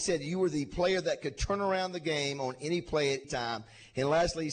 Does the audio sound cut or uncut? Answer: cut